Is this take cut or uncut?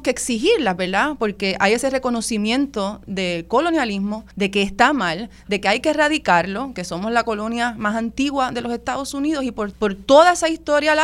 cut